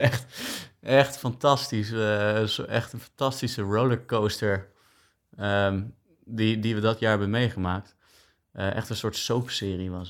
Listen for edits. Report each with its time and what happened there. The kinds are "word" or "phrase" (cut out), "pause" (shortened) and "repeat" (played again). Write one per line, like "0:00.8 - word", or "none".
none